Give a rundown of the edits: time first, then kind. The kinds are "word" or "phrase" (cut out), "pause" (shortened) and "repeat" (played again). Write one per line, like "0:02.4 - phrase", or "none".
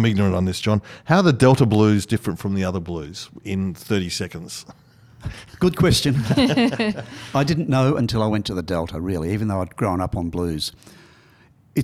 none